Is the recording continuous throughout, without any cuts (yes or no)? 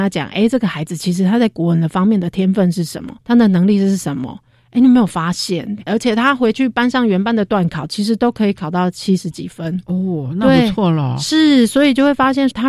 no